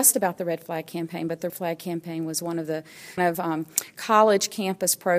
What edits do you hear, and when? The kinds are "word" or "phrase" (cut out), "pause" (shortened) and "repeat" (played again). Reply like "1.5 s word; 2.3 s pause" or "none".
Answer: 1.5 s word; 3.2 s word

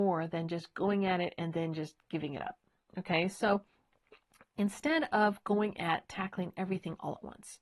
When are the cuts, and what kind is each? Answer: none

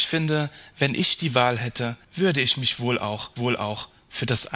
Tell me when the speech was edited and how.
2.0 s pause; 3.4 s repeat

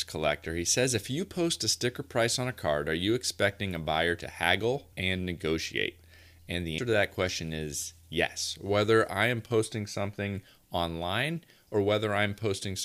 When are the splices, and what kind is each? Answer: 4.9 s pause; 6.8 s word

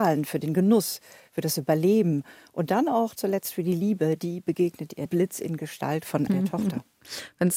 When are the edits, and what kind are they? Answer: 3.2 s word; 5.1 s phrase; 6.3 s word

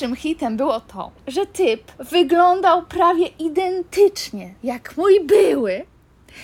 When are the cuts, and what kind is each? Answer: 1.2 s pause; 2.0 s pause; 4.6 s pause

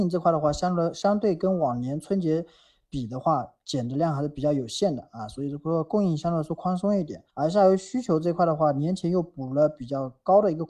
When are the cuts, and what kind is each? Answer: 7.3 s pause

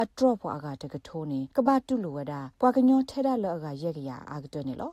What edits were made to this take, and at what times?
1.5 s pause; 2.5 s pause

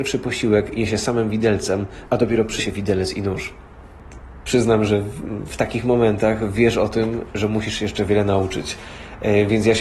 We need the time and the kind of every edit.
2.6 s phrase

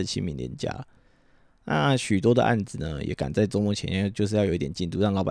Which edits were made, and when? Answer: none

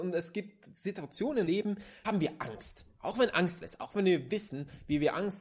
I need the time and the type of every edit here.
1.5 s word; 2.0 s word; 3.6 s word

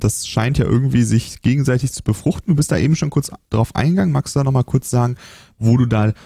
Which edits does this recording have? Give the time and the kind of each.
none

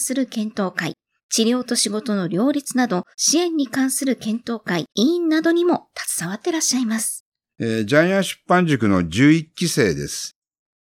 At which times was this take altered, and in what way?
1.2 s pause; 3.1 s pause; 4.9 s pause; 7.4 s pause

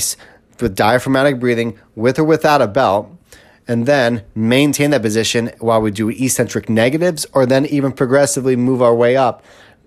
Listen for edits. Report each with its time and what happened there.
none

